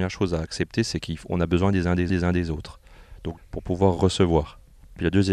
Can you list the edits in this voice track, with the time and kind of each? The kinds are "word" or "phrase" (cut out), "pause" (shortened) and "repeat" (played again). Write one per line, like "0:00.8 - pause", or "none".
0:02.1 - repeat
0:03.4 - word